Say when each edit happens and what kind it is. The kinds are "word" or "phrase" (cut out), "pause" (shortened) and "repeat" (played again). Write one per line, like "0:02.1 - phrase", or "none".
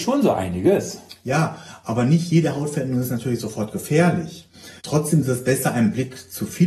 0:04.8 - pause